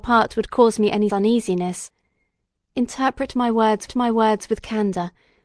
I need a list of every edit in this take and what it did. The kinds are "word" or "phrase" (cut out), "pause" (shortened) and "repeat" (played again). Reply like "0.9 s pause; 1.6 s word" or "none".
1.1 s word; 3.9 s repeat